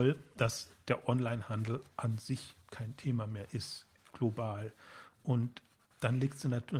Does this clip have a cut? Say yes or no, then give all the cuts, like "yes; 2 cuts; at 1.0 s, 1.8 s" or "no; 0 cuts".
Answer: no; 0 cuts